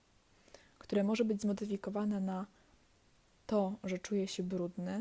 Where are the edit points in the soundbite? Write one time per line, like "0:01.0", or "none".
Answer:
none